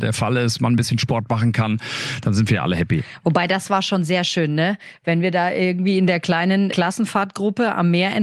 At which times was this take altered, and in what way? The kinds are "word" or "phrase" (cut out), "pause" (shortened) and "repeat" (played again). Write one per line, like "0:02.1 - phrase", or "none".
0:06.7 - word